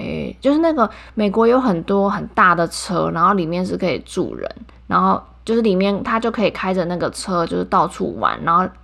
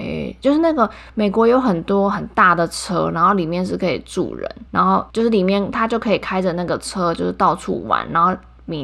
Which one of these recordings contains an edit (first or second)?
second